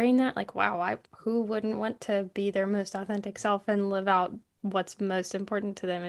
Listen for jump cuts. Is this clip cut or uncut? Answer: uncut